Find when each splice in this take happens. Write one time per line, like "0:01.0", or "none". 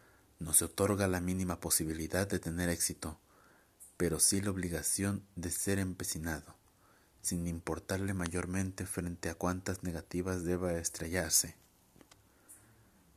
none